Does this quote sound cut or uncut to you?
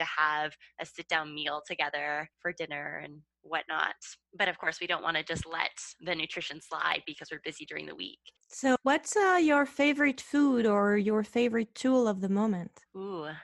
cut